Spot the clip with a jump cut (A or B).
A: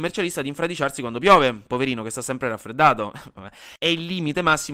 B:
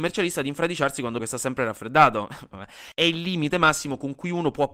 B